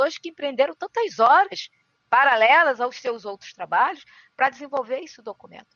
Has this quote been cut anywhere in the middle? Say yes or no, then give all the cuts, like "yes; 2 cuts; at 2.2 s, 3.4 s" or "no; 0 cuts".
no; 0 cuts